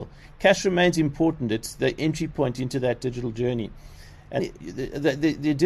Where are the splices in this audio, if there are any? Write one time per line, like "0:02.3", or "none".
0:04.4